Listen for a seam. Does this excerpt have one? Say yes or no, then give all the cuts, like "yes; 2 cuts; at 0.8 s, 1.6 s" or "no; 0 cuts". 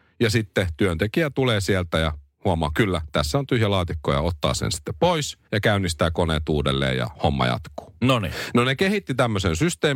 yes; 1 cut; at 5.4 s